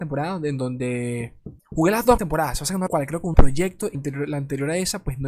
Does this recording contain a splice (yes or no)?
yes